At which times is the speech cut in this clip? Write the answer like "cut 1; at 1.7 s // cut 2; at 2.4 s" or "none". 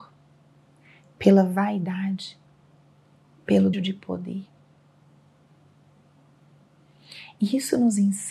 cut 1; at 3.7 s